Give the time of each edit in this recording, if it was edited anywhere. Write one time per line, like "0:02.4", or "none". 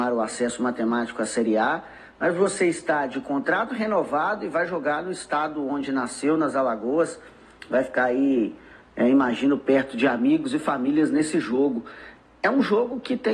none